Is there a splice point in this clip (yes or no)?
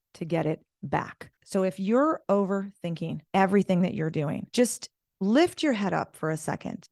no